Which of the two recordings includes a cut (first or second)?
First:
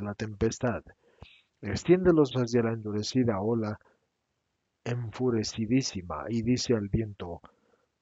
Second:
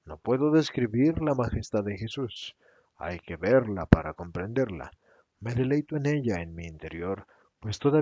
first